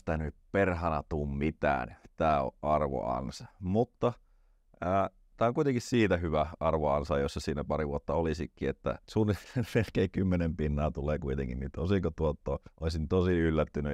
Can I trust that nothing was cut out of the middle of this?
no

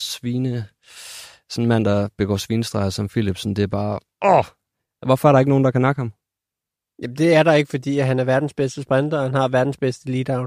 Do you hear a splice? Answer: no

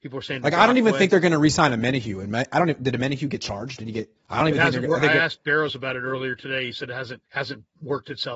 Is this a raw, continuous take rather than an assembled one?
no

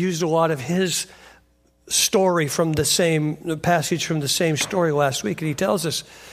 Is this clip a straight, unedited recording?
yes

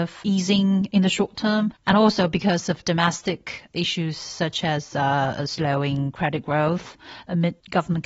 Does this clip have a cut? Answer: no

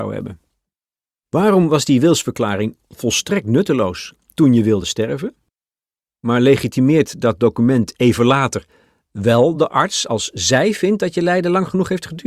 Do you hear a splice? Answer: no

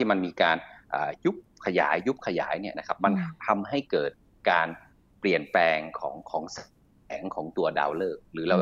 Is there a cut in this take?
no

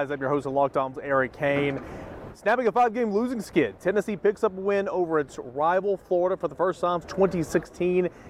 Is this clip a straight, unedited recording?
no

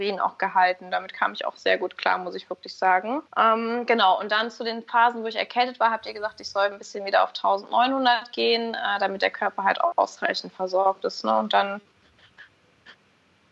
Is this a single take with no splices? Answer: no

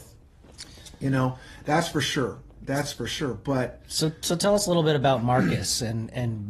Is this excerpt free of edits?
yes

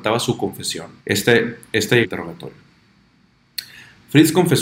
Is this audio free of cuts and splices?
no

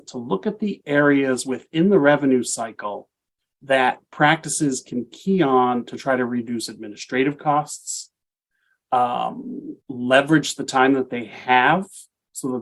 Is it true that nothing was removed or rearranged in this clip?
no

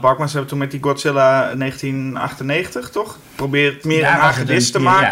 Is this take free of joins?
no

